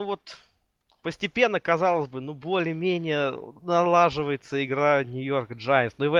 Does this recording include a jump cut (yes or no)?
yes